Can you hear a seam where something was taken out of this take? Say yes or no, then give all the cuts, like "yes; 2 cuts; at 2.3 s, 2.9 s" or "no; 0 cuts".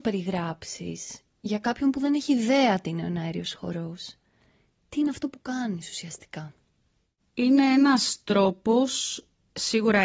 no; 0 cuts